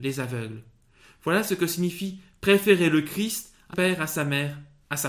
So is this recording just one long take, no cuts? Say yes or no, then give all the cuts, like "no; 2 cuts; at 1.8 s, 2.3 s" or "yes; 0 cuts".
no; 1 cut; at 3.7 s